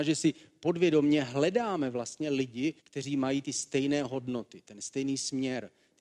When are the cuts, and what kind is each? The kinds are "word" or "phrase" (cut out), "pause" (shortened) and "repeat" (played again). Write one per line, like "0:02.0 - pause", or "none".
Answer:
0:02.8 - pause